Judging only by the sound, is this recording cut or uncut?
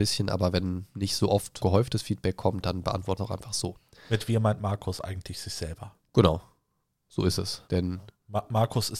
cut